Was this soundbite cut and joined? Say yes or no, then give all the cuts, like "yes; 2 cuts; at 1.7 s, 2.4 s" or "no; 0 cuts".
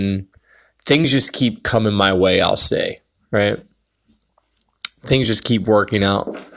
no; 0 cuts